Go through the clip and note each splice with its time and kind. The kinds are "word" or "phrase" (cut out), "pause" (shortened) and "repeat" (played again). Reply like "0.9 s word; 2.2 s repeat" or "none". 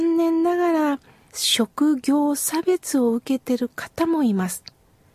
none